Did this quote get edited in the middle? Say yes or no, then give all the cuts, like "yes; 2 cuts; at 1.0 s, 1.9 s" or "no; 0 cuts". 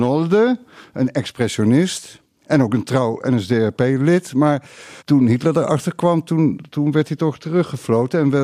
yes; 1 cut; at 5.0 s